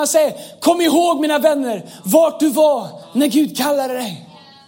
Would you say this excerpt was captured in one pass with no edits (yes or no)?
yes